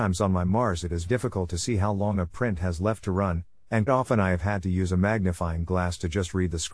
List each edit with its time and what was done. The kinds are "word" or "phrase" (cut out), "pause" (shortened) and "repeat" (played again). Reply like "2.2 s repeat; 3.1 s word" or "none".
1.1 s word; 3.9 s word